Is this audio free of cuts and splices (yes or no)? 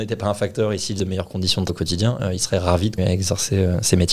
no